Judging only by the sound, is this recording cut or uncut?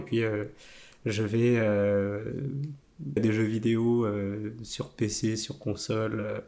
cut